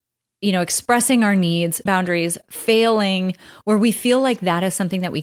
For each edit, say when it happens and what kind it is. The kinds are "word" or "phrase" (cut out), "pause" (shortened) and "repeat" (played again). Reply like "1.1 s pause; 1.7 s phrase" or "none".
1.9 s word